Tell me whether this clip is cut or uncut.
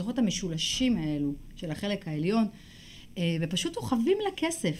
uncut